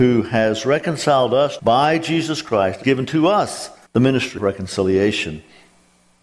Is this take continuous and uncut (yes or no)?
no